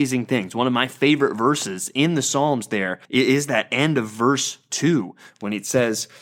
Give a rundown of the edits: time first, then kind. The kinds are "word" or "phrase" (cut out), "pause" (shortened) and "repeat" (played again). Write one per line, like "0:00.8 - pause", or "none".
0:03.0 - pause